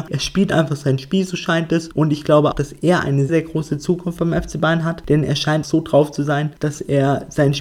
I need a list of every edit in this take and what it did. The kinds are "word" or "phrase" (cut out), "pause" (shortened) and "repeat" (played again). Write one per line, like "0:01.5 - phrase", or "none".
0:02.5 - word
0:03.3 - word
0:05.6 - word